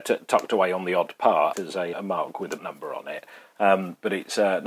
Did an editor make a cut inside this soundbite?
yes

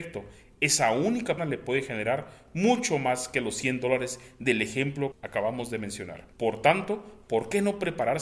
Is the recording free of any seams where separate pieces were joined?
no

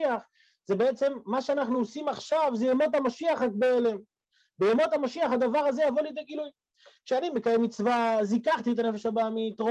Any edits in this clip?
no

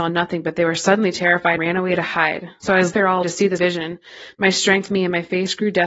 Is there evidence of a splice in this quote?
yes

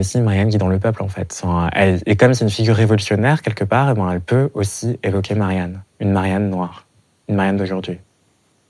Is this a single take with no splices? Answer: yes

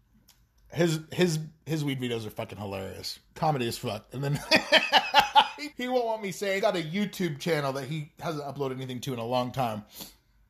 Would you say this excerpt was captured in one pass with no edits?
no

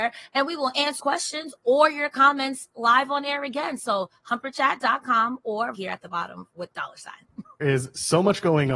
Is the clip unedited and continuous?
no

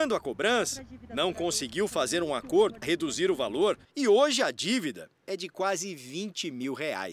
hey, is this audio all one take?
no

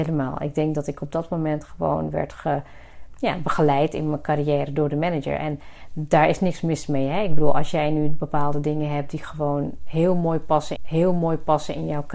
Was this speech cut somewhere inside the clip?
yes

